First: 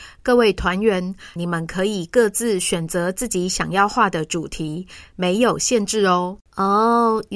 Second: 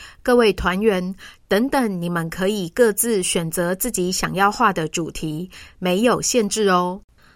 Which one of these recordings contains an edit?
first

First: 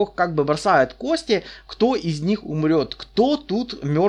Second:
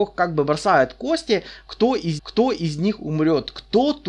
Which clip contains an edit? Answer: second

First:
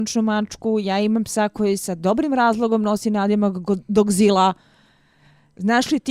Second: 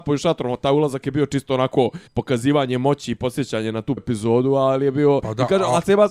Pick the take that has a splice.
second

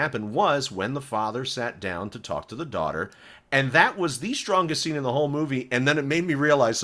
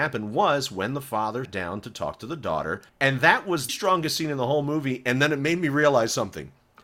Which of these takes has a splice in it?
second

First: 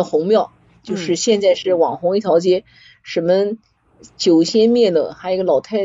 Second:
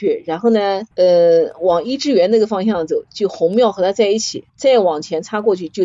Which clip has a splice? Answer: second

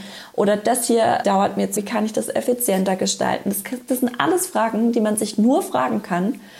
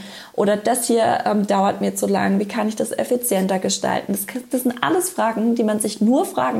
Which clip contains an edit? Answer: first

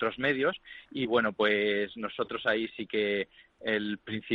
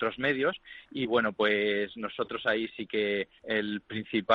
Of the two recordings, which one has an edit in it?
second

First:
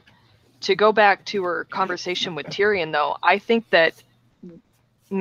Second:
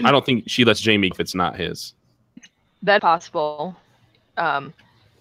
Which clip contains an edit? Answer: second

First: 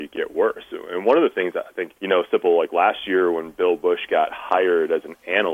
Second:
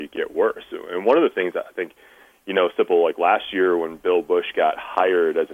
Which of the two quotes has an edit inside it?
first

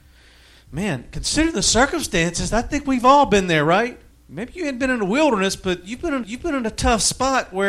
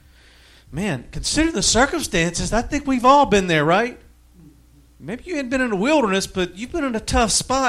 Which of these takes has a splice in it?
first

